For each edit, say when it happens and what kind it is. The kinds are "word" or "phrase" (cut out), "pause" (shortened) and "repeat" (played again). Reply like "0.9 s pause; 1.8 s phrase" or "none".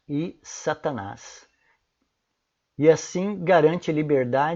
none